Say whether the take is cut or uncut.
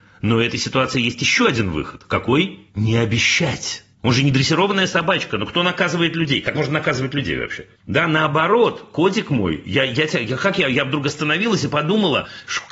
cut